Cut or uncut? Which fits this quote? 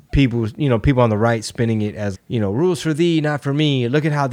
cut